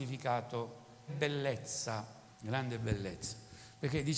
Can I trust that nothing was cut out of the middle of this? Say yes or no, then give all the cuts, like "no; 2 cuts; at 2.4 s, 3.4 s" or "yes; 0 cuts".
no; 2 cuts; at 1.1 s, 2.3 s